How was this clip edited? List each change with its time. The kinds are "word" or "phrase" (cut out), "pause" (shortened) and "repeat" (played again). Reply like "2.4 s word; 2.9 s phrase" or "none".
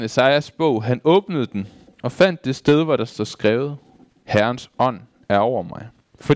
none